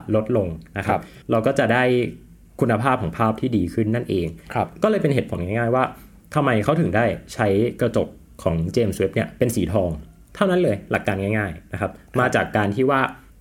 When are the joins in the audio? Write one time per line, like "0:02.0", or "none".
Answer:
0:01.2